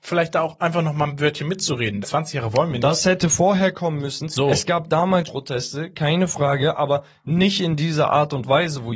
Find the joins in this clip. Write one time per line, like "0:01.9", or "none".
0:02.0
0:05.3